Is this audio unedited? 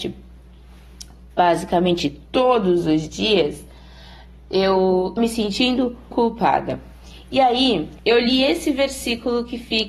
no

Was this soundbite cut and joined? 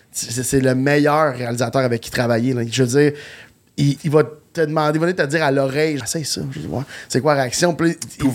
yes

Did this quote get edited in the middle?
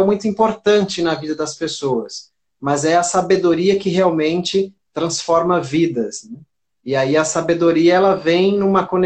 no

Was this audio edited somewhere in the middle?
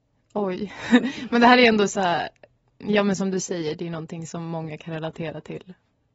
no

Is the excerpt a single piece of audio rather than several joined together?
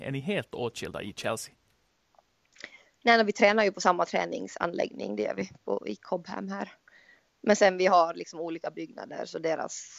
yes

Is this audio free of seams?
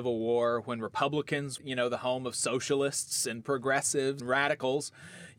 no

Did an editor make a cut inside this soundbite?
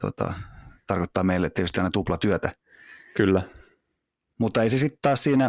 no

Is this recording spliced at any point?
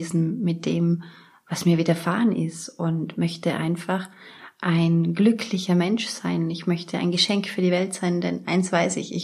no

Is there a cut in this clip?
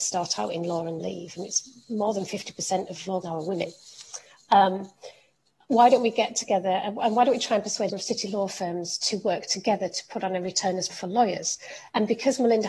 yes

